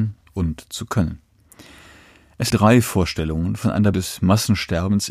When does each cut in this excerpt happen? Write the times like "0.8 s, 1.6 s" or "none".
2.5 s, 3.9 s